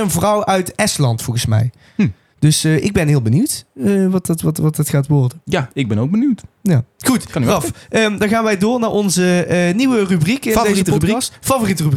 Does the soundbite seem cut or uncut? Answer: uncut